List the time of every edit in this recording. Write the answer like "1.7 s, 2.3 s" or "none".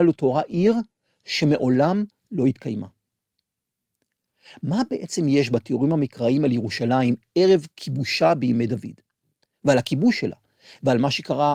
none